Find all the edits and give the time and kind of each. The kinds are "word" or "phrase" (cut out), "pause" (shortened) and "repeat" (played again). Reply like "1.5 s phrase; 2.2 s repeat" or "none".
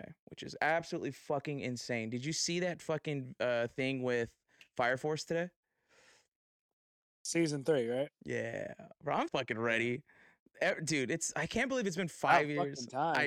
9.3 s word